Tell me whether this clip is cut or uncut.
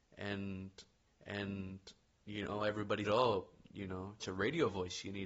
cut